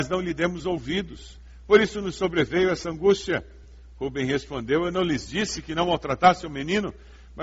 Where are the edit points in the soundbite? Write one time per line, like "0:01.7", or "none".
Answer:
none